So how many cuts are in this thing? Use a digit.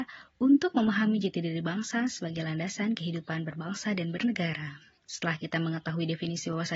1